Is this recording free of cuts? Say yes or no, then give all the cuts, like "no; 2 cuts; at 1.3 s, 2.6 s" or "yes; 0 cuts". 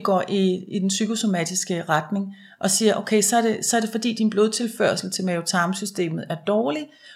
yes; 0 cuts